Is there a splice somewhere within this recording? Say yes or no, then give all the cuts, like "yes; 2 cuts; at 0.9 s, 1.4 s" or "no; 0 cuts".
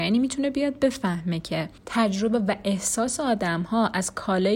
yes; 1 cut; at 1.8 s